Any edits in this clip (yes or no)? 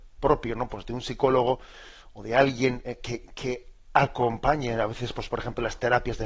no